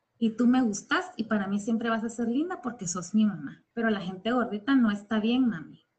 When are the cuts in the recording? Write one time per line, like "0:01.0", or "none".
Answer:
0:03.7